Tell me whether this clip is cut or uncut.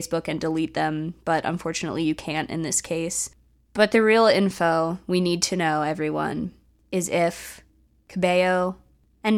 uncut